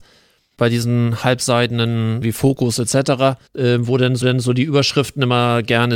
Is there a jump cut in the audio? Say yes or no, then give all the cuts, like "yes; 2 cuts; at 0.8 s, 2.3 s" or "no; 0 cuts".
yes; 3 cuts; at 2.2 s, 3.5 s, 4.2 s